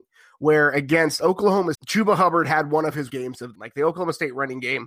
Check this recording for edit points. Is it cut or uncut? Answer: cut